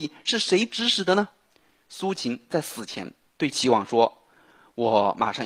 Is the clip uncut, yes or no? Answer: yes